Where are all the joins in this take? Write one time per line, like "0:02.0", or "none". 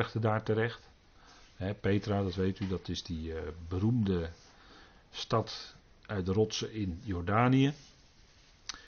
none

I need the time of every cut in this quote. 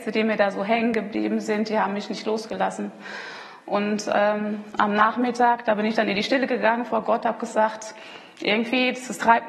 none

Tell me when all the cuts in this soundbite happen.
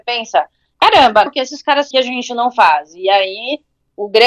0:01.3
0:01.9

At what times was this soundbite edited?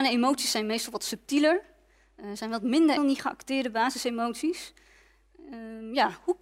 0:03.0

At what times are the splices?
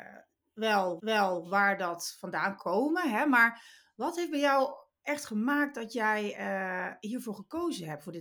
0:01.0
0:02.6

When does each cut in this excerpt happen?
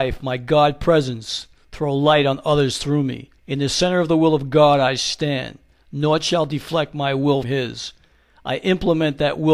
0:03.4
0:07.4

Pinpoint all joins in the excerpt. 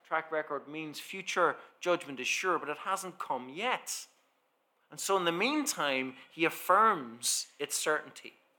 none

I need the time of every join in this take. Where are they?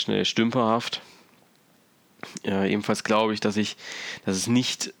none

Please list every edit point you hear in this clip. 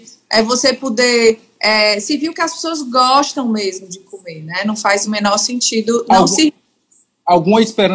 none

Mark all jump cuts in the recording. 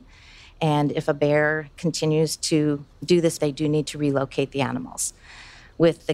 0:02.9
0:03.4

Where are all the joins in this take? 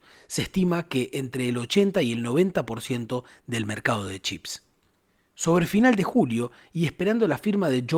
none

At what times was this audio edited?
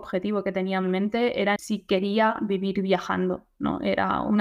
0:01.6

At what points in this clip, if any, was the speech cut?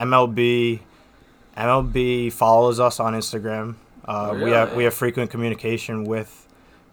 none

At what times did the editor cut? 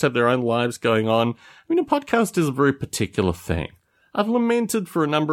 none

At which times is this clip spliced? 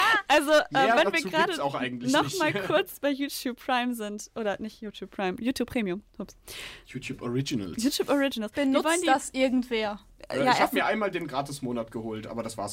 none

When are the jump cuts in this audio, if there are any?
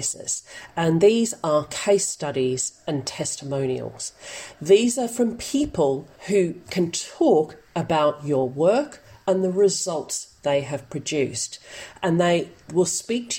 0:06.2

